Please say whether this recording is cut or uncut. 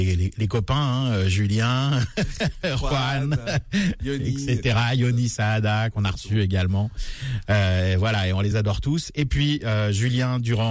uncut